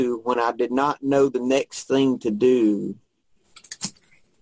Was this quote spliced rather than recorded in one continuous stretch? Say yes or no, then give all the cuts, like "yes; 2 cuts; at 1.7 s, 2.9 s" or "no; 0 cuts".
no; 0 cuts